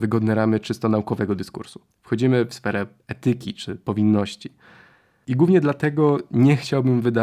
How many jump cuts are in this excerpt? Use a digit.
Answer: 1